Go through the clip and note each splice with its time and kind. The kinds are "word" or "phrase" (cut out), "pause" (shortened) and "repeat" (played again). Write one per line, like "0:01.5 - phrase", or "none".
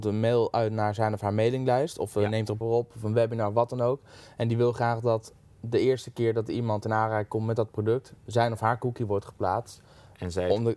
0:02.6 - phrase